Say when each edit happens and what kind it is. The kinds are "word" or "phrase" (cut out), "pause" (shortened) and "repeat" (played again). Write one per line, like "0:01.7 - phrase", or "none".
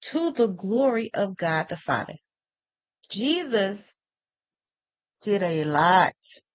none